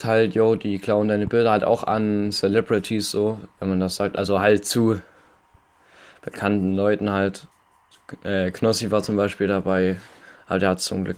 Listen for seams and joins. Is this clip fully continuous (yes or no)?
yes